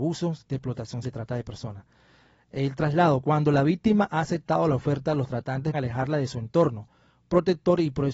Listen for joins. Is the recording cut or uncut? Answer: cut